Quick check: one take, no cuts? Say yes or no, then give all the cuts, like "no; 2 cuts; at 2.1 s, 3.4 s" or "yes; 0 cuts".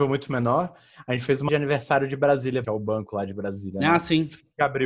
no; 2 cuts; at 1.5 s, 2.6 s